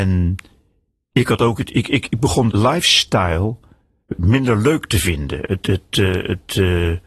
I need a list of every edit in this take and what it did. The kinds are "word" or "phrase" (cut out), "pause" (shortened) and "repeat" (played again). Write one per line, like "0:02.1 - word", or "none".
0:02.5 - word